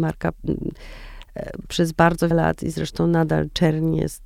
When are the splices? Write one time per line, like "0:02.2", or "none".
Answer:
0:02.3